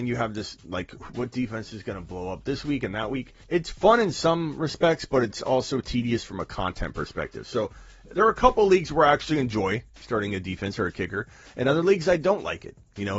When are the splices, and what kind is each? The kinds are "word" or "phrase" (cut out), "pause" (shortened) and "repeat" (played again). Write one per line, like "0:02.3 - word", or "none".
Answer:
0:03.4 - pause